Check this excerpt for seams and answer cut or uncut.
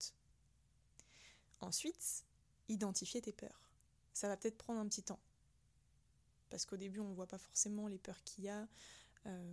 uncut